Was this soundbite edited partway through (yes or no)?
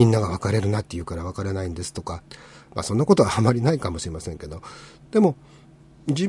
no